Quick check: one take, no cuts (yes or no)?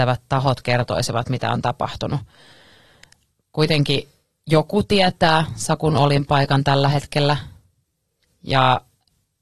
yes